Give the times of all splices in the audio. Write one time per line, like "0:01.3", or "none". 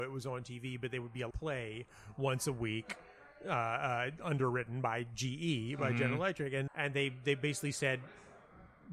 0:01.3
0:06.7